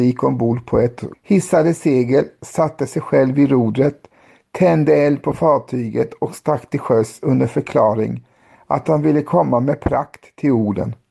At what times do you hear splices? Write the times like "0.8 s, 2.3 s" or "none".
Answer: 1.1 s